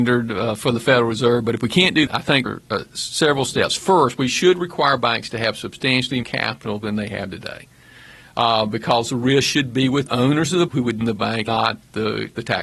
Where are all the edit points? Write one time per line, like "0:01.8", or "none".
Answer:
0:02.1
0:02.5
0:06.2
0:10.1
0:10.7
0:11.0
0:11.5